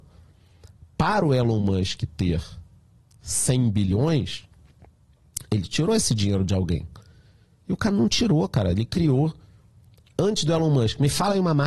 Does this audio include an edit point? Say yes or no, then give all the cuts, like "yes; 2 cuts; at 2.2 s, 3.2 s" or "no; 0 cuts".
no; 0 cuts